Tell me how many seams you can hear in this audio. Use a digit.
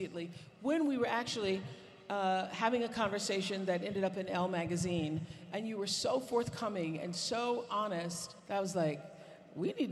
1